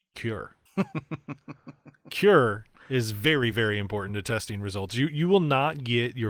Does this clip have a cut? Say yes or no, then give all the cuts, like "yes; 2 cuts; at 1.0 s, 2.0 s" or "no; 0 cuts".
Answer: no; 0 cuts